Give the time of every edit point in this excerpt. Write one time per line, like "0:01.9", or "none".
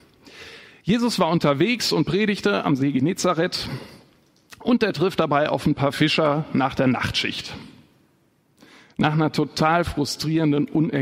none